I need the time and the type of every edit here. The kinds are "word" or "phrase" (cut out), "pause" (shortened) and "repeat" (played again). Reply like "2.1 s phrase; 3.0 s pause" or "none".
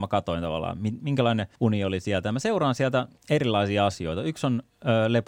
1.5 s pause; 3.2 s pause